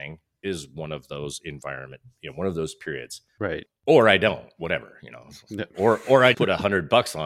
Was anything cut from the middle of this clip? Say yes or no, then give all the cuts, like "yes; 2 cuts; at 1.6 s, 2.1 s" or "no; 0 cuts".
yes; 2 cuts; at 3.3 s, 6.3 s